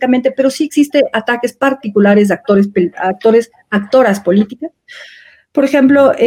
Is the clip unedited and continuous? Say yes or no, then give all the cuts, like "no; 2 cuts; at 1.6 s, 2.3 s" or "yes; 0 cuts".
yes; 0 cuts